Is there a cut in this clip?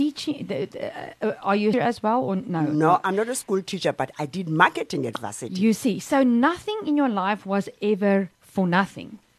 yes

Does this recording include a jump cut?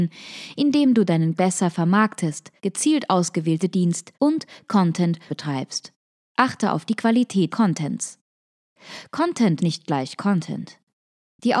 yes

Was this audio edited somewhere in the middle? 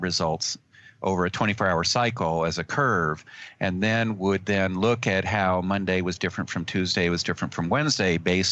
no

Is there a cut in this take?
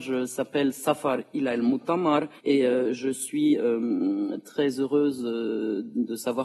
yes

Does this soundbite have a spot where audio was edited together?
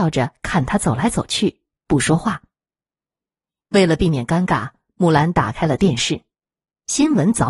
no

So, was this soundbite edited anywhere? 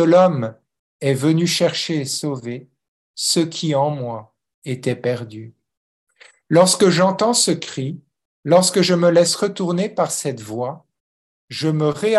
no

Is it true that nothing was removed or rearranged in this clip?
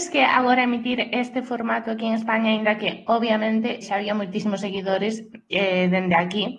no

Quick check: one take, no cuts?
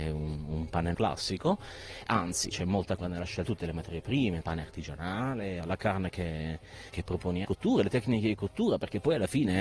no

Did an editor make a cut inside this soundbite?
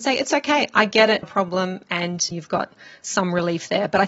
yes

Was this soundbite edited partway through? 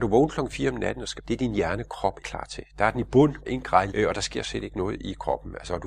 yes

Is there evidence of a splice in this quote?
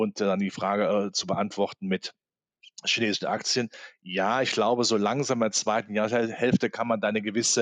no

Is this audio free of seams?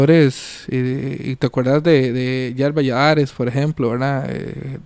yes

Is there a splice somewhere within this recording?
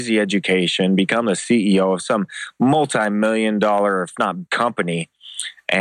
yes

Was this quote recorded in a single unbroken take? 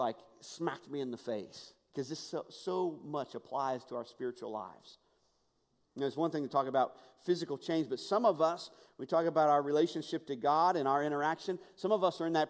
yes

